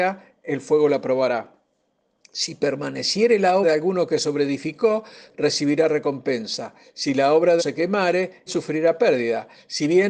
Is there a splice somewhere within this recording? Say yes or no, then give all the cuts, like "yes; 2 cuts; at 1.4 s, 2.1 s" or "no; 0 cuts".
yes; 3 cuts; at 3.6 s, 7.6 s, 8.5 s